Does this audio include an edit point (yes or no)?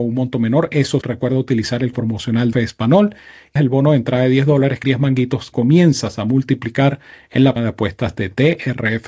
yes